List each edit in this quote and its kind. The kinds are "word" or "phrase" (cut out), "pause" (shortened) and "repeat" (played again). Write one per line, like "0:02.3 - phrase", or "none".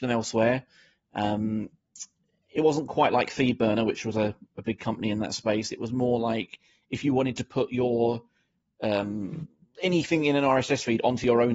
none